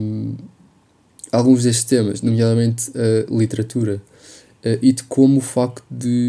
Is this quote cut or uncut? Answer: uncut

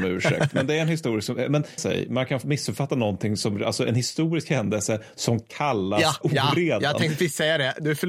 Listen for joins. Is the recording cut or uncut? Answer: cut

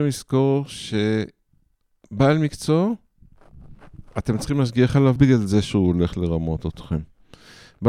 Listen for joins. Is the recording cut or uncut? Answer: cut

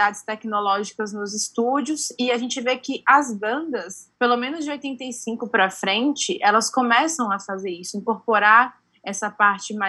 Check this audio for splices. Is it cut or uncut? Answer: cut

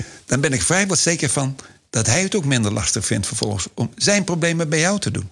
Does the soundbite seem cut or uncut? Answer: uncut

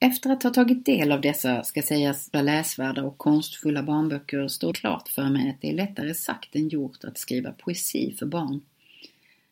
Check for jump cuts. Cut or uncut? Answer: cut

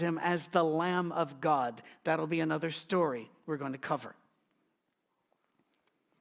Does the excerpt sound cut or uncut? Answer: uncut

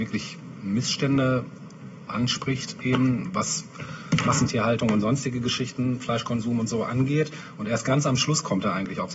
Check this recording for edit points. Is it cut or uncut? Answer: uncut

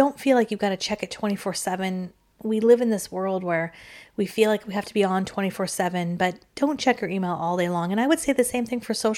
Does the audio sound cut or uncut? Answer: uncut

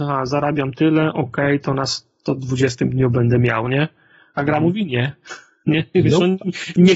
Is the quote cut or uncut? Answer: uncut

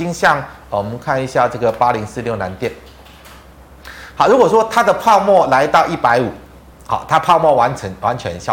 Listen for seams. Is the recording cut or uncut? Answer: uncut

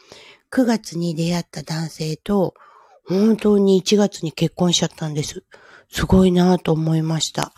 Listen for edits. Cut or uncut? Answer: uncut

